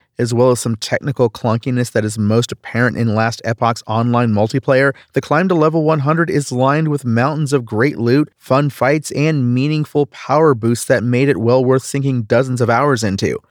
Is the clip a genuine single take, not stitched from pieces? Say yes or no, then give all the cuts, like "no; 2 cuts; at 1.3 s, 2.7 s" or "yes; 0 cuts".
no; 2 cuts; at 5.0 s, 8.3 s